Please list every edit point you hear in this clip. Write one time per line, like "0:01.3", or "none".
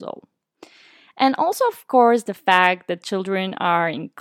none